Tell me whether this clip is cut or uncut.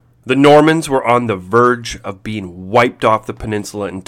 uncut